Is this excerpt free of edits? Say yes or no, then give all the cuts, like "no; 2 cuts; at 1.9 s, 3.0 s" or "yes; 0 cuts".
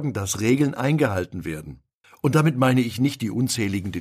no; 1 cut; at 2.0 s